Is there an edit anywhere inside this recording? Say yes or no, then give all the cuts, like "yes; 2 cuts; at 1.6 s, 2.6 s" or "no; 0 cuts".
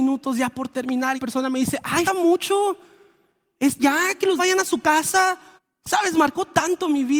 yes; 5 cuts; at 1.2 s, 2.1 s, 3.8 s, 4.4 s, 5.6 s